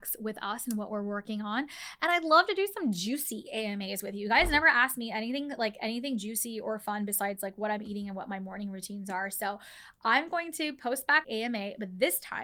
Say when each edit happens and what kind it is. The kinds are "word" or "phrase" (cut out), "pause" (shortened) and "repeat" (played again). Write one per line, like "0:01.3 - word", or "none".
0:11.2 - phrase

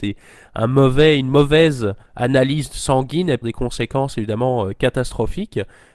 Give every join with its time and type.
0:02.1 - pause
0:03.4 - word

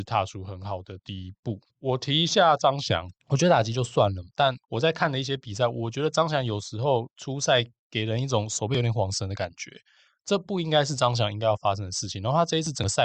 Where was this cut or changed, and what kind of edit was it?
0:01.7 - pause
0:03.2 - pause

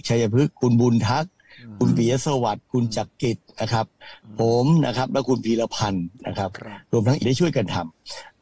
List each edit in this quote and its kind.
0:07.2 - word

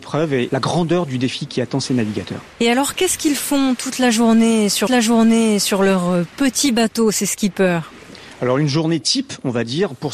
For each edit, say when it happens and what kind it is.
0:01.5 - word
0:02.5 - pause
0:04.9 - repeat

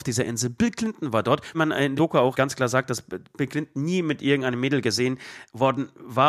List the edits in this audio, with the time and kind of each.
0:01.5 - word
0:02.0 - word
0:02.3 - word

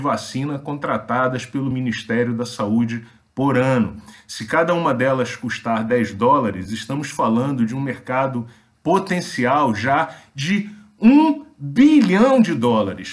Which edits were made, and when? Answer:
none

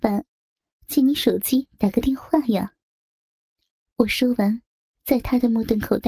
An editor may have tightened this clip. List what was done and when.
0:02.9 - pause
0:04.9 - pause

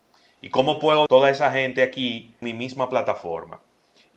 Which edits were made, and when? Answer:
0:01.1 - word
0:02.4 - word

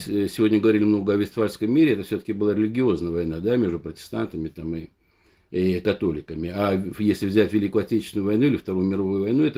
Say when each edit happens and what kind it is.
none

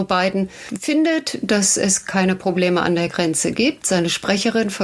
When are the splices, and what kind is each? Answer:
none

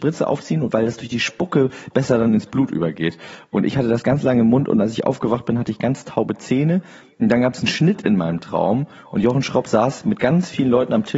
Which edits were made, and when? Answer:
none

